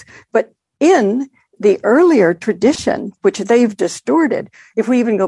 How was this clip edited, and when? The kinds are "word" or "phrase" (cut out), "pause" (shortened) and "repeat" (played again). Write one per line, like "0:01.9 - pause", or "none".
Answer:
none